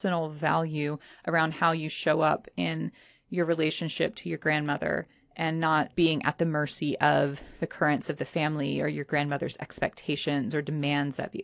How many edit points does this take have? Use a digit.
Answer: 0